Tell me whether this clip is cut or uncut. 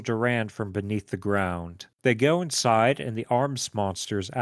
cut